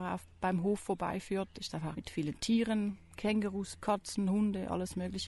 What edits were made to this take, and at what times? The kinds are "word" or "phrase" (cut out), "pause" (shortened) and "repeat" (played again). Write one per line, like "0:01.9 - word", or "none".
0:01.9 - phrase
0:03.8 - word